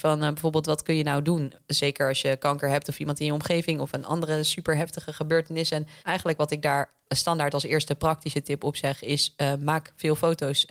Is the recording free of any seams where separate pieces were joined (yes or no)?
no